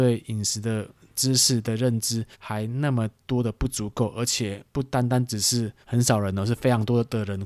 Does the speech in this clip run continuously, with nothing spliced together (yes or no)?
no